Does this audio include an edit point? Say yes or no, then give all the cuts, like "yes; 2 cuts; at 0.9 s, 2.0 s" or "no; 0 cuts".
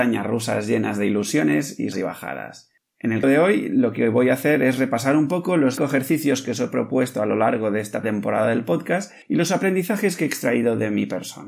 yes; 5 cuts; at 1.9 s, 3.2 s, 5.8 s, 8.0 s, 9.2 s